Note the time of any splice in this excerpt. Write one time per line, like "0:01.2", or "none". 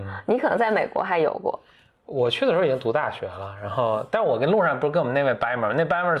none